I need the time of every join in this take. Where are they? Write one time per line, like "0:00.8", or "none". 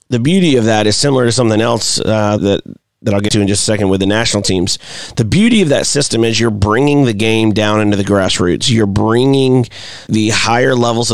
0:02.4
0:03.3
0:10.1

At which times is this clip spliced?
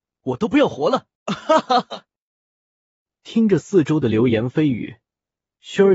0:01.1

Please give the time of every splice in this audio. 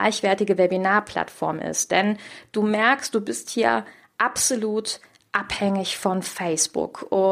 none

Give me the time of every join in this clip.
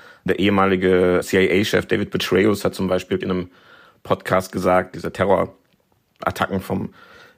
0:03.2

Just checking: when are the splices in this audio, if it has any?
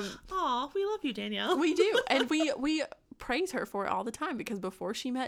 none

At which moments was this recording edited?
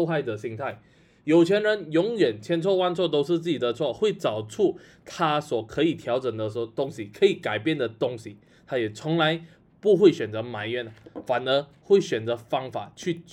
none

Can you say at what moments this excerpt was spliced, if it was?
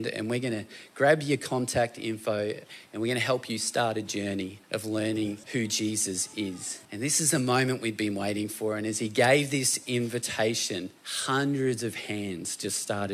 0:04.6
0:05.4
0:06.8
0:11.0

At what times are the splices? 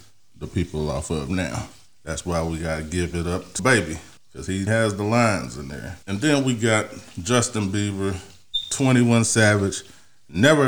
0:03.6
0:04.7
0:06.0

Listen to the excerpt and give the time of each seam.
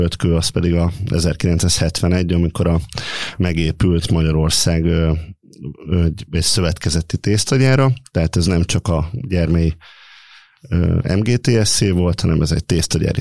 none

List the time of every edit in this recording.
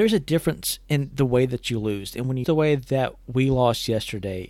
0:02.4

